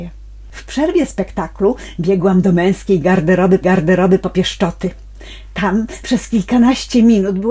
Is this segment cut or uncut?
cut